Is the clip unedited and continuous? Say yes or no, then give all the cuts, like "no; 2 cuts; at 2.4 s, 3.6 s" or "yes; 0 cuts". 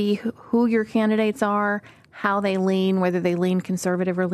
yes; 0 cuts